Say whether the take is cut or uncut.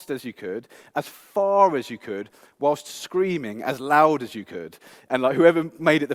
uncut